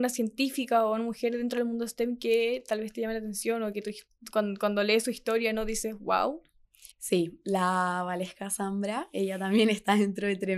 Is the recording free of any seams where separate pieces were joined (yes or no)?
no